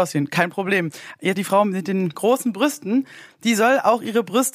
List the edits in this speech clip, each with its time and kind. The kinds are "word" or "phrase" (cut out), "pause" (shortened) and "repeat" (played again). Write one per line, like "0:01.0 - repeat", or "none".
0:01.3 - phrase
0:02.1 - word